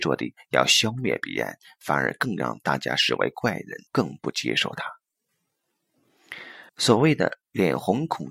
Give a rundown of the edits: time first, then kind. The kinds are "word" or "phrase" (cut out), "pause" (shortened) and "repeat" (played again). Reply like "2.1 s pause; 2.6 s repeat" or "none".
3.9 s pause; 6.7 s pause